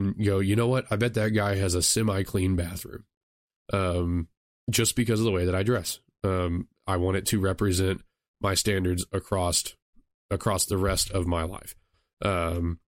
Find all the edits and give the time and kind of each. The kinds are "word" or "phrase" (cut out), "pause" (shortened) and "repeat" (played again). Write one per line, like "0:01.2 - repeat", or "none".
none